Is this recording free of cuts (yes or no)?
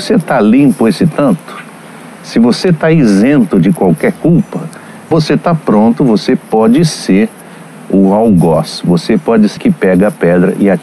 no